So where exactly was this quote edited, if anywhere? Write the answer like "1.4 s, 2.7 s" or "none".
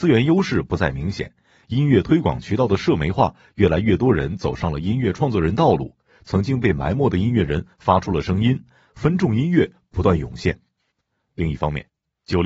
none